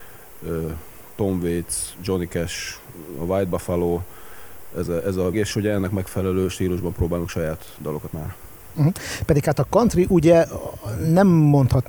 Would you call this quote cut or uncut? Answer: cut